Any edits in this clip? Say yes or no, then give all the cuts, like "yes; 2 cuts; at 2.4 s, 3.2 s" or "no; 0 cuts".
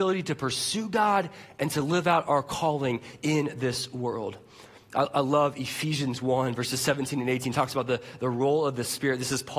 no; 0 cuts